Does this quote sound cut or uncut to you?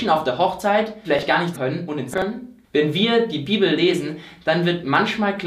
cut